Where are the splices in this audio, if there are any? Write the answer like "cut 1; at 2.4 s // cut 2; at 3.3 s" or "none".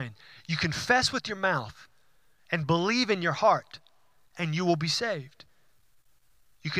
none